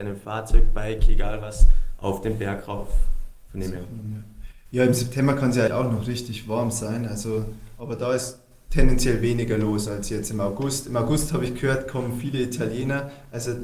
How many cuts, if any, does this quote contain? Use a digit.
1